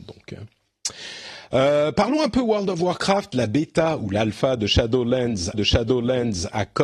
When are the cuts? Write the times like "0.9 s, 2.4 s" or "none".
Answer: 5.5 s